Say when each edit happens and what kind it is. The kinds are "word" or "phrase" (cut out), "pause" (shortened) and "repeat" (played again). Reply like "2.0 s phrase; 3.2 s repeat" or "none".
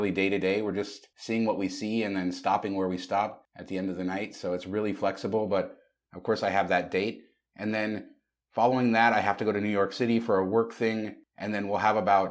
none